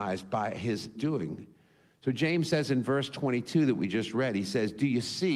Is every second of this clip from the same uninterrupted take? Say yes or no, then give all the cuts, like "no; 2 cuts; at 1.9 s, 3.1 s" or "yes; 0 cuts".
no; 1 cut; at 1.0 s